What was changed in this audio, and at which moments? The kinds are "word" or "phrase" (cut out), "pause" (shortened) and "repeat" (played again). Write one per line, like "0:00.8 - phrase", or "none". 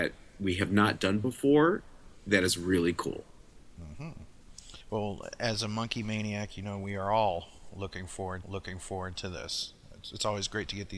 0:04.8 - pause
0:08.4 - repeat